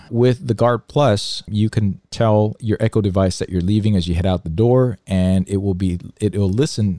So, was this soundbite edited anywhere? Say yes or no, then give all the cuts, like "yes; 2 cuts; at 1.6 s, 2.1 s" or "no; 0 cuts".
no; 0 cuts